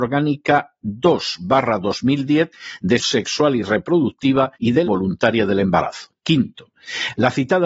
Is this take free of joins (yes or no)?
no